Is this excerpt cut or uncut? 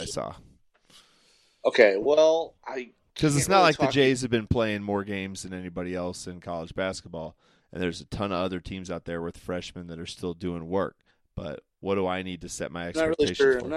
cut